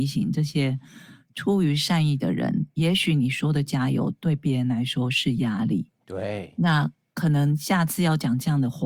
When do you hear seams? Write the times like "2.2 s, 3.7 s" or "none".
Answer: none

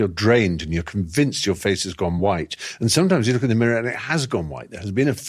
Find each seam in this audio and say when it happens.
none

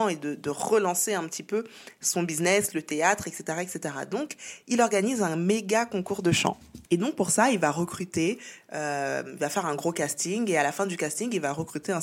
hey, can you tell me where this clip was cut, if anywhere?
6.8 s

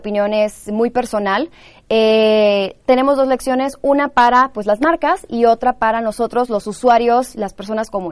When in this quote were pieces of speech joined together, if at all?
none

